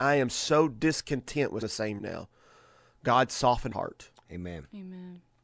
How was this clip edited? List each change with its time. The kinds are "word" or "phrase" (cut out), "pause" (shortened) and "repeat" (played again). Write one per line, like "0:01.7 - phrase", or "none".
0:01.6 - word
0:02.0 - word
0:03.7 - word